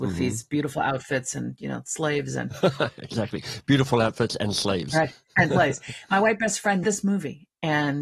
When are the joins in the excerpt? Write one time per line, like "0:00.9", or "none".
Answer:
0:06.8